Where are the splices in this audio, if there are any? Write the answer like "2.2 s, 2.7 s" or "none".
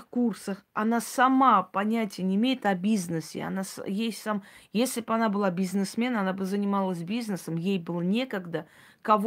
none